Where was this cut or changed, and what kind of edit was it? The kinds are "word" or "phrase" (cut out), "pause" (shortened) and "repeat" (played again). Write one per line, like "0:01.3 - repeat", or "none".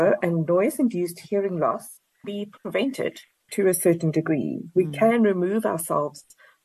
0:02.2 - word
0:03.5 - word